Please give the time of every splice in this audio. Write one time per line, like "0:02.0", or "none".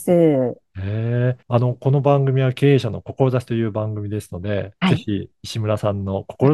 0:01.4